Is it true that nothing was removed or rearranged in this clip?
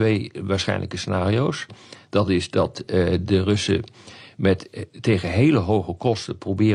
yes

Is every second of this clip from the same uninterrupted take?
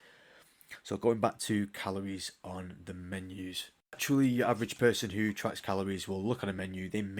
no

